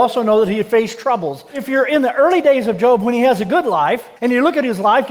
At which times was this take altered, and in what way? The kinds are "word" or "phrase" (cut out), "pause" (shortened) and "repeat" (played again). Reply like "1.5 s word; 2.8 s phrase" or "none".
4.2 s pause